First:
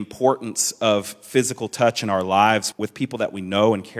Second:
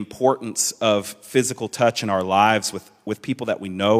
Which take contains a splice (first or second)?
first